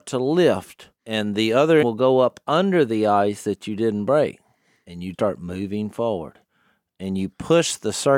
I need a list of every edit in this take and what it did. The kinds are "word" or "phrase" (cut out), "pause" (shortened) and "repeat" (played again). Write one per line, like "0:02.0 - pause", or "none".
0:01.0 - pause
0:01.8 - word
0:05.1 - word